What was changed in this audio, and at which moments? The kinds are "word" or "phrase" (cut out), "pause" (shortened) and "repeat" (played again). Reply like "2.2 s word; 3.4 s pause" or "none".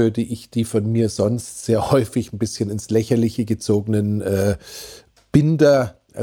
none